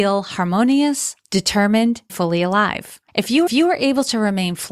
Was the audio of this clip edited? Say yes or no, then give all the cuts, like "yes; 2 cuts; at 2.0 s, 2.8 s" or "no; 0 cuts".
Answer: yes; 4 cuts; at 1.2 s, 2.1 s, 3.1 s, 3.5 s